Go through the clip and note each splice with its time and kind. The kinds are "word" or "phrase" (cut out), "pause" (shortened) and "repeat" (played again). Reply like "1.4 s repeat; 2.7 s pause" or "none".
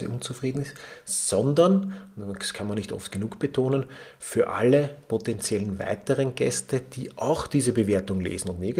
none